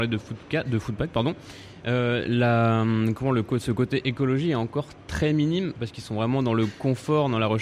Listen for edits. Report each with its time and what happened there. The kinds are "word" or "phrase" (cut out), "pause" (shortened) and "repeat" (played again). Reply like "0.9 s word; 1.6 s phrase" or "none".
none